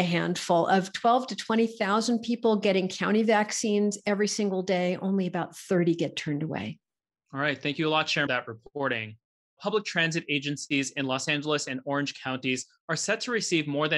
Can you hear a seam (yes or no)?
yes